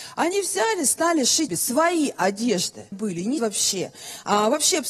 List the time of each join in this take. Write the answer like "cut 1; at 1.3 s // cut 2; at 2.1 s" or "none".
cut 1; at 1.5 s // cut 2; at 2.9 s // cut 3; at 3.4 s